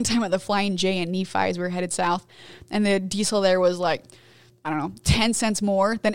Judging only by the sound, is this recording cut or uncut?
uncut